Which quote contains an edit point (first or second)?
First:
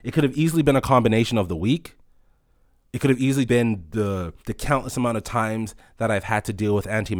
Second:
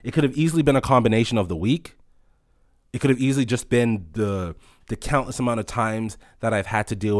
first